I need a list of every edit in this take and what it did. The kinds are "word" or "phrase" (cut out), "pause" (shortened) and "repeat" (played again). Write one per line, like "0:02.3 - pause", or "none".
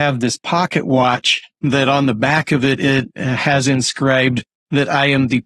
0:01.5 - pause